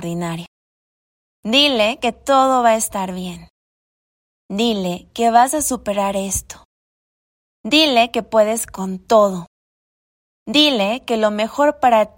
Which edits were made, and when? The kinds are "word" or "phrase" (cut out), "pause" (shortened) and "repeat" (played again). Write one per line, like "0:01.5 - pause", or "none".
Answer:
none